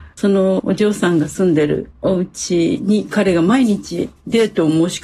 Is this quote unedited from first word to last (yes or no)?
yes